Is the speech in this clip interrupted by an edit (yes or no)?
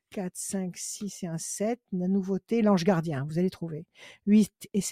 no